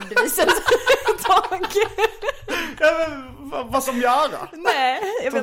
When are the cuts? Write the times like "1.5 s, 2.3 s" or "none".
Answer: 3.9 s